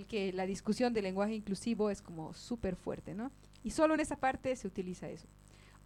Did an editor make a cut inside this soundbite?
no; 0 cuts

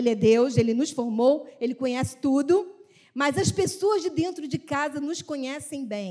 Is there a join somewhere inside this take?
no; 0 cuts

